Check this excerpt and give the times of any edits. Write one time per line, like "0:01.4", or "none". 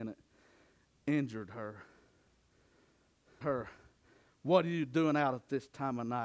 0:03.4

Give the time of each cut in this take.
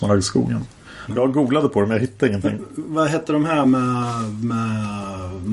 none

